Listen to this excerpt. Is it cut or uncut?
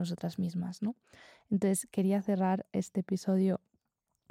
uncut